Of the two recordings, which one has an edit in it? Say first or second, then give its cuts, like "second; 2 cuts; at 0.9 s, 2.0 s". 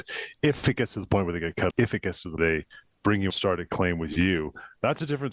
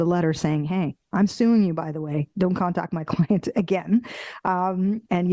first; 3 cuts; at 1.7 s, 2.4 s, 3.3 s